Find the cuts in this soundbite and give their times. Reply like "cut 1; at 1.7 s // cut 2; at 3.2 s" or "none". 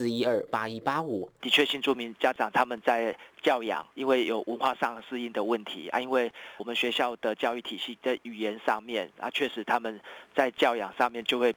cut 1; at 3.9 s // cut 2; at 6.6 s